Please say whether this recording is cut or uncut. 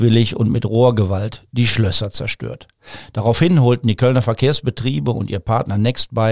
uncut